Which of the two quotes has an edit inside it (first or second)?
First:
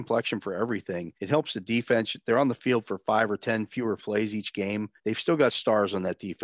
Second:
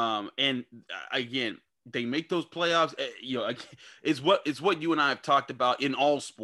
first